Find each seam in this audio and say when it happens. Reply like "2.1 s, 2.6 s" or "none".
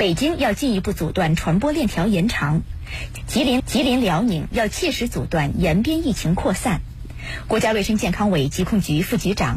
3.6 s